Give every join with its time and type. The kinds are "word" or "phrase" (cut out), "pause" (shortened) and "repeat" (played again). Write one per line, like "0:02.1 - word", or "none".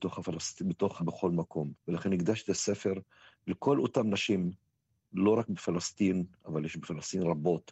0:01.0 - phrase